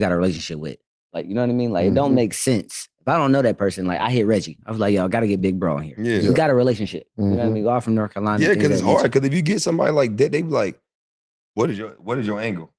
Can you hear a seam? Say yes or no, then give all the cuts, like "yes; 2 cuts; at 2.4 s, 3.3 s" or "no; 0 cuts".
no; 0 cuts